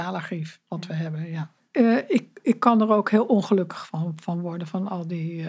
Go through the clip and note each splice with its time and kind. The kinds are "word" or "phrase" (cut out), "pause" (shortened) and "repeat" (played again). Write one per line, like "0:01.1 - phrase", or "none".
none